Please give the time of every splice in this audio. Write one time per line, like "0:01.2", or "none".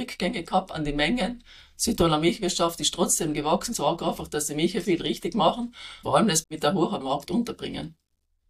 0:03.7
0:04.8
0:06.0
0:06.4
0:07.0